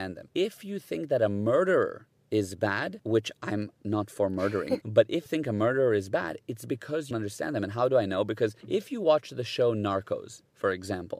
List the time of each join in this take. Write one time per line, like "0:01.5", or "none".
0:04.8
0:05.3
0:07.1